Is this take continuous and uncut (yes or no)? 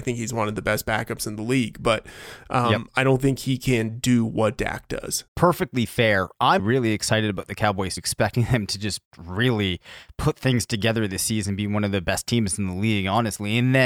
no